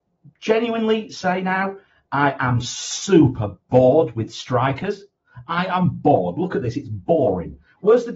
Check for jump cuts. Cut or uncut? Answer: uncut